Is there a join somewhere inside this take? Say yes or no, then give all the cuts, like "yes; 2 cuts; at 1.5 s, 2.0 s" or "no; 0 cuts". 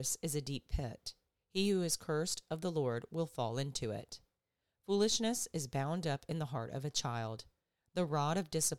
no; 0 cuts